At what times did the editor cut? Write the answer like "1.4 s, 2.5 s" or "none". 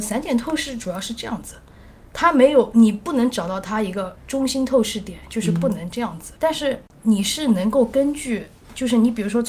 6.4 s